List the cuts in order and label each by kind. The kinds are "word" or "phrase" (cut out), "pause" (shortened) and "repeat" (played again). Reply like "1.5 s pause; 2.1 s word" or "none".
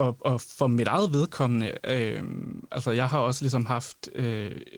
none